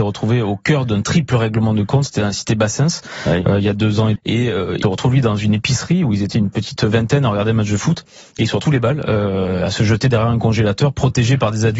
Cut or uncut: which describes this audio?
cut